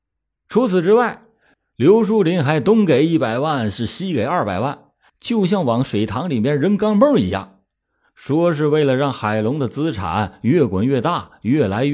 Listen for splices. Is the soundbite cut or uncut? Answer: uncut